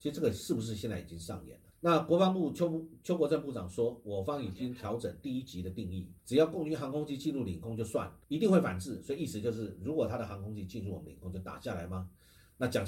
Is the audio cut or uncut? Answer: cut